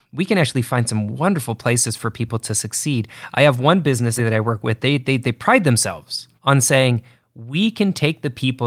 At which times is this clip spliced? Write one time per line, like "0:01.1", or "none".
0:04.2
0:04.8
0:06.4